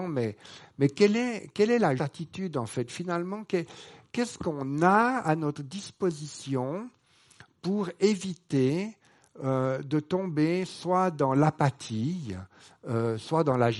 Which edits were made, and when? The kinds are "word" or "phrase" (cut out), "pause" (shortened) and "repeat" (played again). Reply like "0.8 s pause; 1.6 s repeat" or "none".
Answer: 2.0 s word